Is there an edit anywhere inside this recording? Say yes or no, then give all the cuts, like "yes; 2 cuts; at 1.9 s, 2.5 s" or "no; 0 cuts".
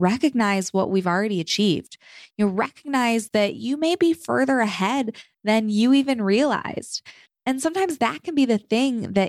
no; 0 cuts